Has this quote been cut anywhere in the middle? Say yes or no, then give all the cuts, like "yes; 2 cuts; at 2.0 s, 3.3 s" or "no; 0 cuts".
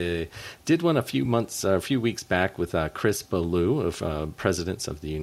no; 0 cuts